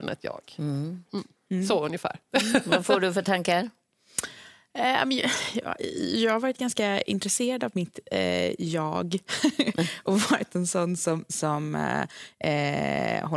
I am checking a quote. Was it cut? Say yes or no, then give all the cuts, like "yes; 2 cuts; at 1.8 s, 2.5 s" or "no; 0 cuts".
no; 0 cuts